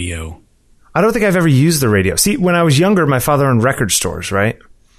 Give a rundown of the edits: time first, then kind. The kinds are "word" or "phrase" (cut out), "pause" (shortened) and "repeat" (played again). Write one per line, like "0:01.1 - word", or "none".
none